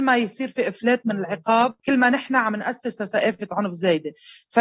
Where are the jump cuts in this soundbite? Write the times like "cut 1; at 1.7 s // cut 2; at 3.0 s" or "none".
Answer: cut 1; at 1.8 s